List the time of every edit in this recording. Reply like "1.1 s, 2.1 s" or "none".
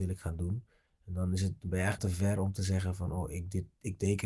2.0 s